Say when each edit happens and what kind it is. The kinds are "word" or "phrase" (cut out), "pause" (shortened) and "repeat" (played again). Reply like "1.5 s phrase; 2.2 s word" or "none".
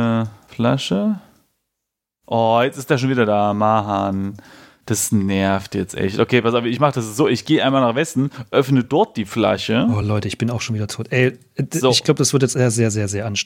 none